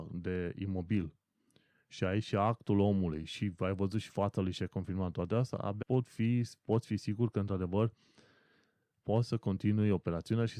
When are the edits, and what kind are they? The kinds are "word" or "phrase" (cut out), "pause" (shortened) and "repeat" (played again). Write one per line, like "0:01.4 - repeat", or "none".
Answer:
0:05.8 - word